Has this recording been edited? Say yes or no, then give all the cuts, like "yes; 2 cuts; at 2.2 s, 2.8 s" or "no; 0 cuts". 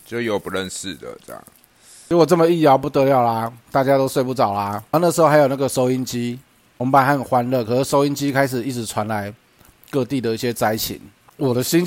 yes; 1 cut; at 4.9 s